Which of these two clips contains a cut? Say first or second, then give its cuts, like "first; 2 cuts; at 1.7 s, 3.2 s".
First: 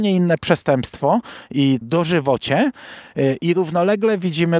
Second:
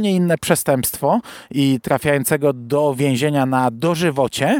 first; 1 cut; at 1.8 s